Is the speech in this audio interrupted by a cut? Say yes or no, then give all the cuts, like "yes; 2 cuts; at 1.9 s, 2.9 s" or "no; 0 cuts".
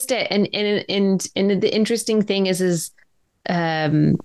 no; 0 cuts